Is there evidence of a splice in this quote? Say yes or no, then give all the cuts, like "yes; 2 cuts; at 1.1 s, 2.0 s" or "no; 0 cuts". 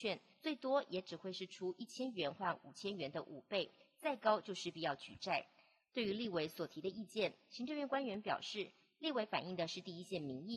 no; 0 cuts